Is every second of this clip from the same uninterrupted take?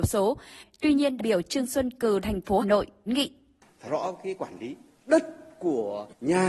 no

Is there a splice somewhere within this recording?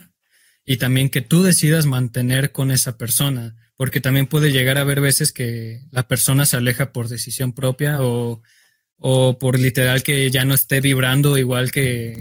no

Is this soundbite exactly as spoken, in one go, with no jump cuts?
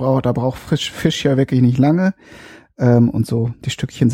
yes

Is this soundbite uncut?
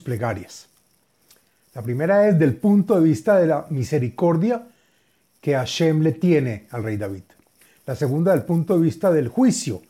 yes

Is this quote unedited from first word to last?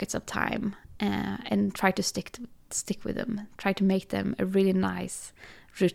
yes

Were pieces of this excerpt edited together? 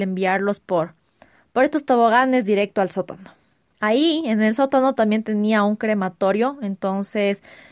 no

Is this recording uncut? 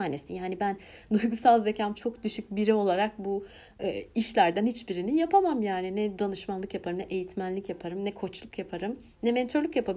yes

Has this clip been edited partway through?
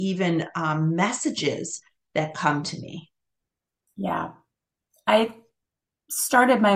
no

